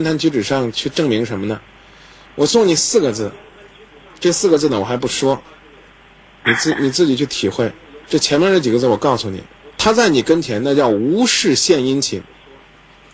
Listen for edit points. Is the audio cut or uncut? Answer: cut